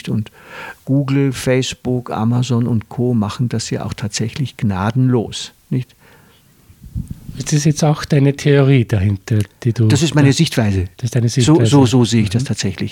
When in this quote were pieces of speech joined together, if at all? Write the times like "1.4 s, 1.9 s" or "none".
5.6 s